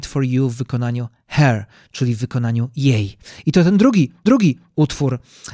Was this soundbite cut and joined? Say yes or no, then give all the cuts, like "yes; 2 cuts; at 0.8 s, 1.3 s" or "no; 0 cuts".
yes; 1 cut; at 4.3 s